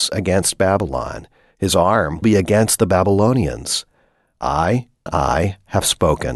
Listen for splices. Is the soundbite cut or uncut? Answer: cut